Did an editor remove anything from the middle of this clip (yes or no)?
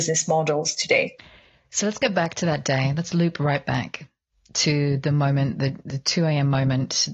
no